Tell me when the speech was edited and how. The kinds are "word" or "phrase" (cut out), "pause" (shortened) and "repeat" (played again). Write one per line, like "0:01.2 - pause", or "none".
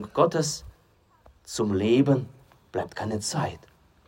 none